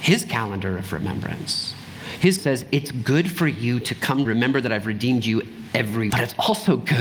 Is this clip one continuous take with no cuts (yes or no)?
no